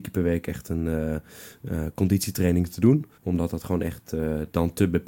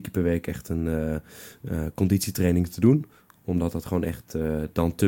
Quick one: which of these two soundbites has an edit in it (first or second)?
first